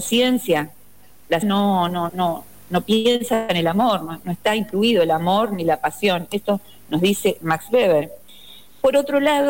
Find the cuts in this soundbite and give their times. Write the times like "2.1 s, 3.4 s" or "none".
1.4 s, 2.1 s